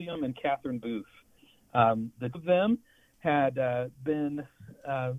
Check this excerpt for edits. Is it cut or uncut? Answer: cut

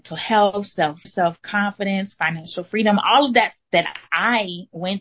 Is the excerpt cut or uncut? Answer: cut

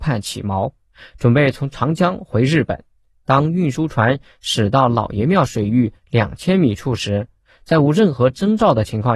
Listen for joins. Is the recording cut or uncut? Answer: uncut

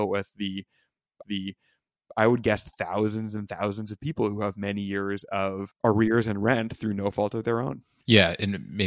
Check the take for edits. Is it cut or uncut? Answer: cut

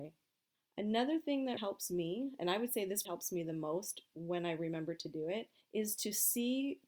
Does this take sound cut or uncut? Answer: cut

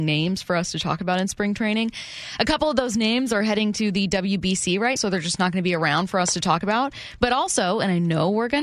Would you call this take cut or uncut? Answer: cut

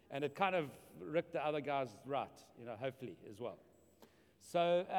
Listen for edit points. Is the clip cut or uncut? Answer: uncut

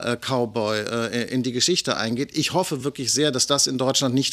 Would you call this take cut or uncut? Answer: uncut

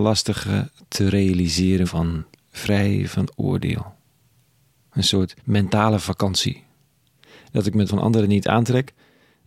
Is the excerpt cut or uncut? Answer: cut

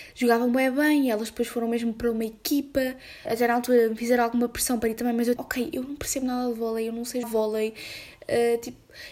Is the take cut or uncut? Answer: cut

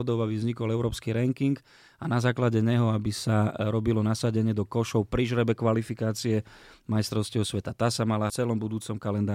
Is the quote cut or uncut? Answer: cut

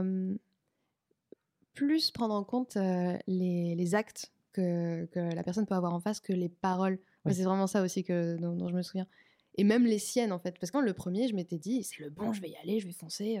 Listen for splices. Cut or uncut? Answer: cut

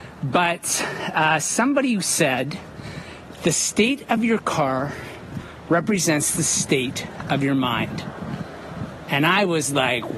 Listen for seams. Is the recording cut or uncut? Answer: uncut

